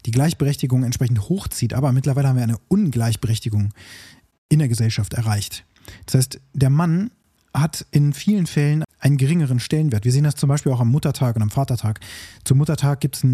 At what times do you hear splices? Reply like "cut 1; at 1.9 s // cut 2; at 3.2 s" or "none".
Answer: cut 1; at 8.8 s